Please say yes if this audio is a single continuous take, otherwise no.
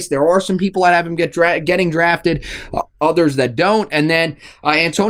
yes